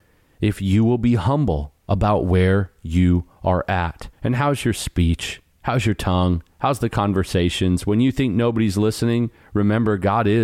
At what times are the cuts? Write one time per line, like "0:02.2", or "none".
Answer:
0:01.8
0:04.1